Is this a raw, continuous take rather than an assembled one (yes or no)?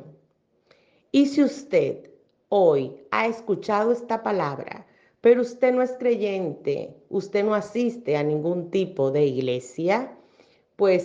yes